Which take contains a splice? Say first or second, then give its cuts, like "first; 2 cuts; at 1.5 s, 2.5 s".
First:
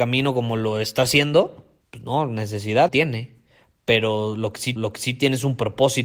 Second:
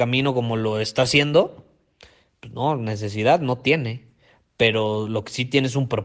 first; 3 cuts; at 1.8 s, 2.9 s, 4.8 s